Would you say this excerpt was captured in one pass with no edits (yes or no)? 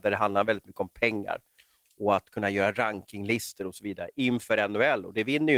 yes